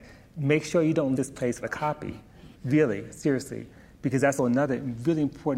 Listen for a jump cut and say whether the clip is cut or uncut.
cut